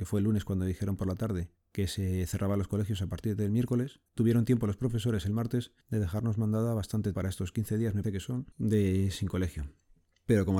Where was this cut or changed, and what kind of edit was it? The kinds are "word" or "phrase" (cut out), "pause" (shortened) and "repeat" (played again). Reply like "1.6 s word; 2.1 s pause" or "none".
1.6 s pause; 4.1 s pause; 5.8 s pause; 7.1 s word; 8.0 s word; 8.5 s pause